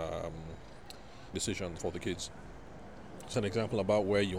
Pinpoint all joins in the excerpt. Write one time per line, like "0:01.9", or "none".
0:01.3
0:01.8
0:03.3